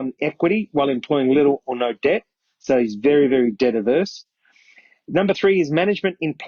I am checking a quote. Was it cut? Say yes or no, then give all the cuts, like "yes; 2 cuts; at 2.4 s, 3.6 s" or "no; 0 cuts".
no; 0 cuts